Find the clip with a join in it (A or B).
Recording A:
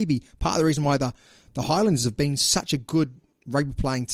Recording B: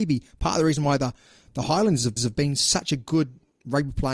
B